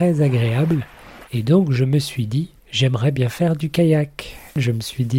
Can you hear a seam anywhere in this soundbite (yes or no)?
yes